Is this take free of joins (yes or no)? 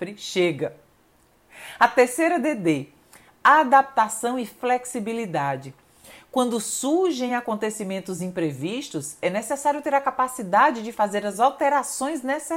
yes